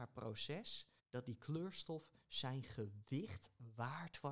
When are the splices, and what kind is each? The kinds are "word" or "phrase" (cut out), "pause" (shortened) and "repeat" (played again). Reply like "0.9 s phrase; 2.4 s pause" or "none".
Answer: 1.0 s pause